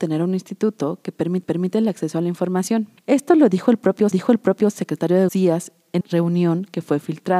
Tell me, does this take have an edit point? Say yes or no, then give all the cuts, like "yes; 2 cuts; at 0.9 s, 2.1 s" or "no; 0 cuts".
yes; 5 cuts; at 1.4 s, 3.0 s, 4.1 s, 5.3 s, 6.0 s